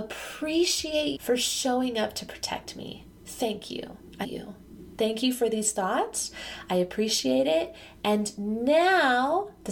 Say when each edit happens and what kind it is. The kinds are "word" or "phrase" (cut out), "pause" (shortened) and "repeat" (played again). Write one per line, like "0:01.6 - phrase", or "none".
0:01.1 - word
0:04.2 - word